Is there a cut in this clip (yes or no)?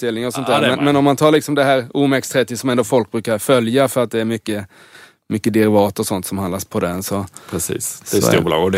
no